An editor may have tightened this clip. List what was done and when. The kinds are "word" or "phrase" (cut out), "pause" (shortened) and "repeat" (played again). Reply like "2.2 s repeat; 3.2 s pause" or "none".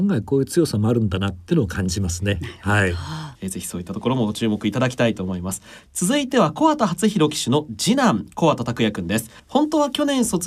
9.4 s pause

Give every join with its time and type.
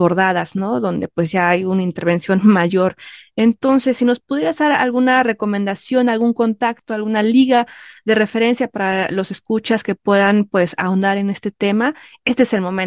none

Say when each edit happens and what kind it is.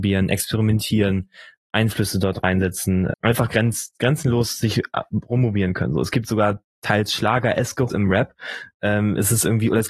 3.1 s word; 7.9 s word

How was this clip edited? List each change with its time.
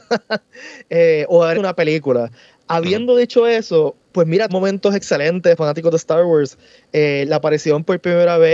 1.5 s word; 4.5 s word; 5.6 s word

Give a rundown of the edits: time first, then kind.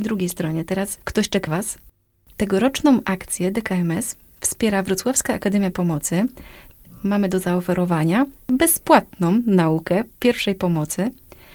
1.0 s pause; 1.5 s word; 5.7 s word

